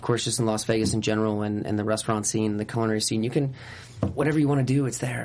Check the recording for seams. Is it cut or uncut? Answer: uncut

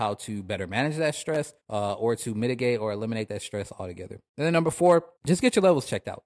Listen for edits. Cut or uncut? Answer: cut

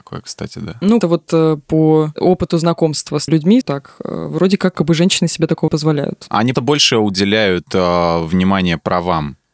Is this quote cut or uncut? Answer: cut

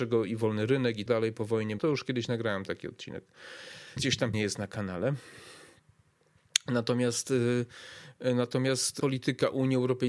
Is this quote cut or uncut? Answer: cut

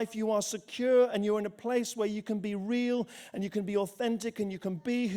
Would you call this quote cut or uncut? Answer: uncut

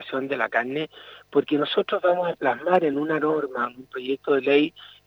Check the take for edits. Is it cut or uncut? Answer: uncut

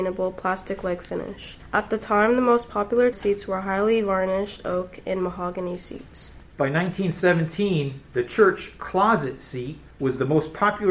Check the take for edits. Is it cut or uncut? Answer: cut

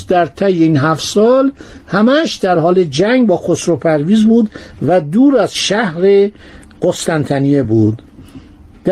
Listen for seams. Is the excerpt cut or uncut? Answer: uncut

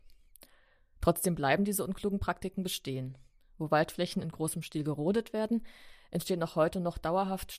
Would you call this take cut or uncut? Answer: uncut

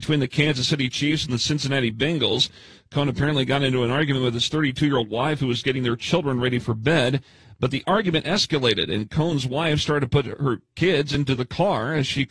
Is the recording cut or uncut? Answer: uncut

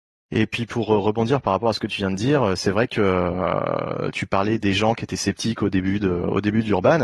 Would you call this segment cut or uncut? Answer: cut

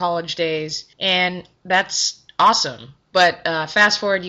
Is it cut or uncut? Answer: cut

